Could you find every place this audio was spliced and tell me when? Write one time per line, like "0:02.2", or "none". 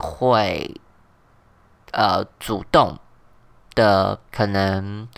0:04.3